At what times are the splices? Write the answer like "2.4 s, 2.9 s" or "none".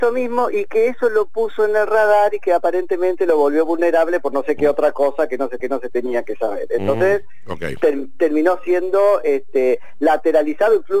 5.6 s